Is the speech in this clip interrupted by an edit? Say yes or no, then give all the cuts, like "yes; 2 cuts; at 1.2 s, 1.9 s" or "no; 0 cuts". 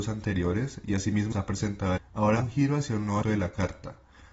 yes; 4 cuts; at 1.3 s, 2.0 s, 2.4 s, 3.2 s